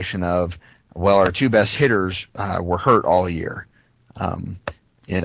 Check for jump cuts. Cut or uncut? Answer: uncut